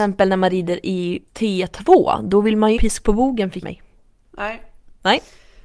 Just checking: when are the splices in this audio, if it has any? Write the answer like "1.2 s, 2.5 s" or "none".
1.3 s, 2.8 s, 3.6 s, 4.1 s